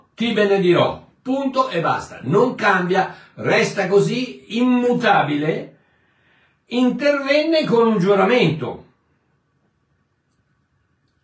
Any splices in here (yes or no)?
no